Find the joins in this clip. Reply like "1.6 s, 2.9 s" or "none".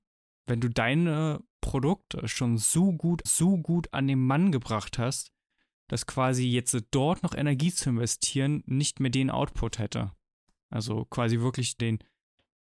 1.5 s, 3.3 s, 11.8 s